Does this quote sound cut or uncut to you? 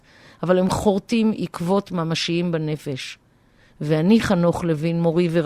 uncut